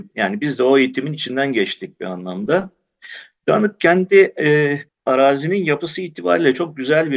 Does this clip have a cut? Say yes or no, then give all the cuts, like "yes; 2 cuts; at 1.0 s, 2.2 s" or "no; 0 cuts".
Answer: yes; 1 cut; at 4.9 s